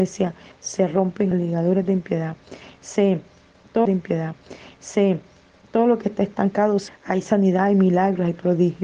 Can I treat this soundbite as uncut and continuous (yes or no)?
no